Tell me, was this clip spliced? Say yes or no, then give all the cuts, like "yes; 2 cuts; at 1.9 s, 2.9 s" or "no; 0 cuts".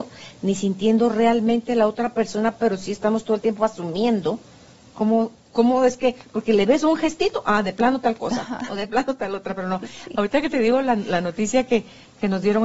no; 0 cuts